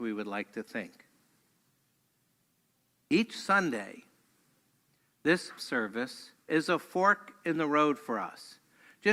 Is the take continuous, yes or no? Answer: no